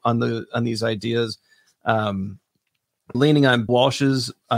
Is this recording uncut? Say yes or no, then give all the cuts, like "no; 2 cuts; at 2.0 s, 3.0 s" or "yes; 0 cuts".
no; 2 cuts; at 3.1 s, 3.7 s